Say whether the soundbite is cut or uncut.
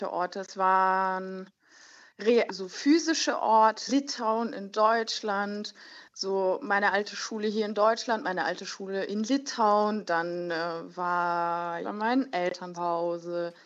cut